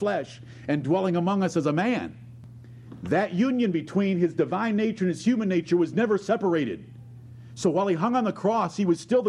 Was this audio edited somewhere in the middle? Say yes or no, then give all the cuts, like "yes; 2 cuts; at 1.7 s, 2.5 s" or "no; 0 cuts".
no; 0 cuts